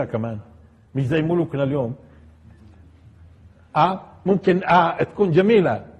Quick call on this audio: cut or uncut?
uncut